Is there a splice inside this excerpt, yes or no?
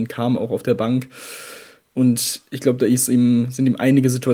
no